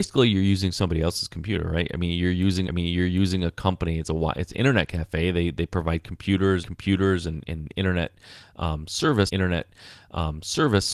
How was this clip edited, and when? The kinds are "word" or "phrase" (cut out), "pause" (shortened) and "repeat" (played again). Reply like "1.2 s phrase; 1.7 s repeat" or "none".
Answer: 2.7 s repeat; 6.6 s repeat; 9.3 s repeat